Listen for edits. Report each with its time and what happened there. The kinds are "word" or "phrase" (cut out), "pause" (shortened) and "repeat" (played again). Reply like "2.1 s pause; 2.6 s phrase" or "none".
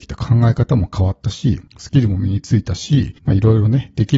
1.7 s pause; 3.2 s pause